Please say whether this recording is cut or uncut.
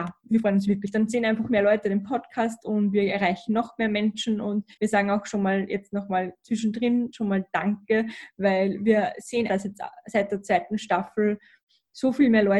cut